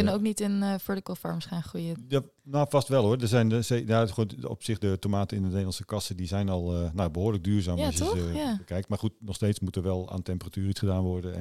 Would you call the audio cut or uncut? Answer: uncut